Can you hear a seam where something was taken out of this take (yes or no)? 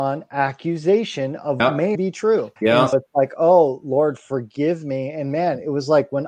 yes